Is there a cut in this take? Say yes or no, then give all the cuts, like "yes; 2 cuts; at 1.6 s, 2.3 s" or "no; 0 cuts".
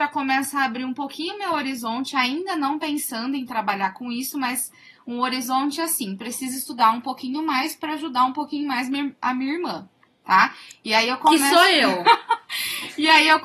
no; 0 cuts